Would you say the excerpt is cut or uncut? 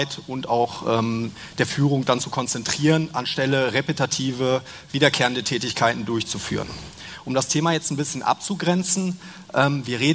uncut